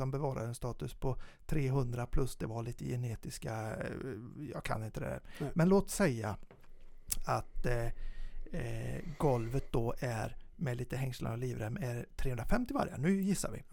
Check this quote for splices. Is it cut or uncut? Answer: uncut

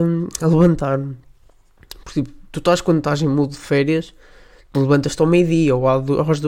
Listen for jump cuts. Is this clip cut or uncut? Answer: uncut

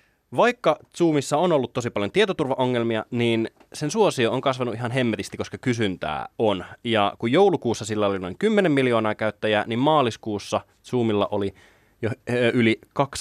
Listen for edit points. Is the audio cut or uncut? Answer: uncut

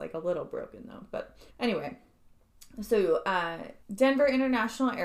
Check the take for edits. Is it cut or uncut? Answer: cut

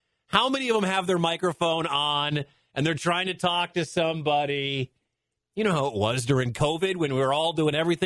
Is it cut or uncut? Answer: uncut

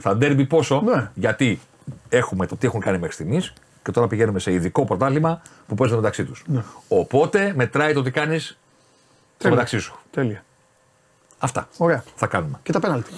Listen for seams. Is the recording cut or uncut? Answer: uncut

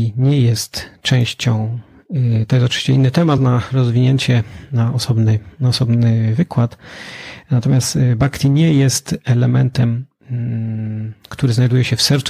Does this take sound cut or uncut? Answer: uncut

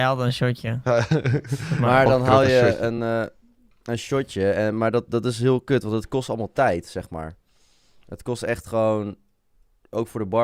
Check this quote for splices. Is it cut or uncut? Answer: uncut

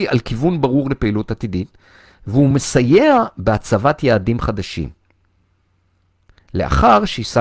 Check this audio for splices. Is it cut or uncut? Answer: uncut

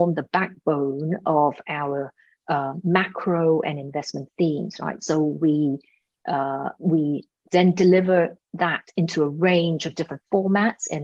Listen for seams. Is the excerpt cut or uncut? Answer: uncut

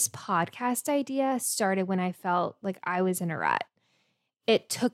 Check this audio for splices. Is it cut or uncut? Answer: uncut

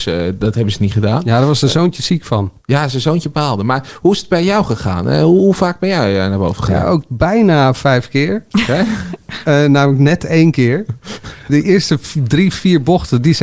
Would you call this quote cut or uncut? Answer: cut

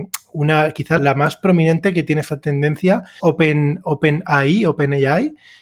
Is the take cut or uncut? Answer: cut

